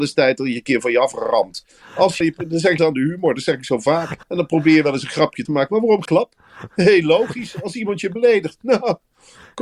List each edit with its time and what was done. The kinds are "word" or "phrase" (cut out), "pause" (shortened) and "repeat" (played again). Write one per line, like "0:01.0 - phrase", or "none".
0:02.2 - word
0:02.8 - word
0:04.2 - pause
0:05.5 - word
0:06.1 - word